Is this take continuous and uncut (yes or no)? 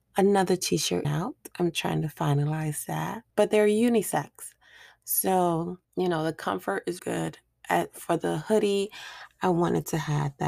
no